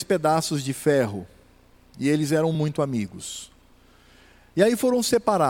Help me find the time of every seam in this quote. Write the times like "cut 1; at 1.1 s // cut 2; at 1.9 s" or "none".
none